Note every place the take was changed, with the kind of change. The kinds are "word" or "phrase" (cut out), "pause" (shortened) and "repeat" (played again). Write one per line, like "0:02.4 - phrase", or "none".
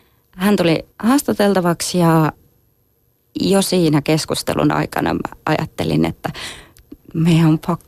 0:00.9 - pause